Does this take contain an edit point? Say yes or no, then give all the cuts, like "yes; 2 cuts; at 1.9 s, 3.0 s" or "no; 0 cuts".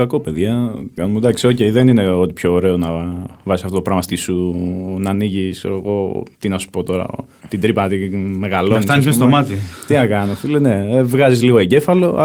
yes; 2 cuts; at 1.0 s, 4.1 s